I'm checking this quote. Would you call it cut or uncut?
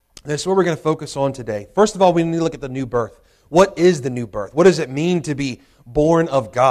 uncut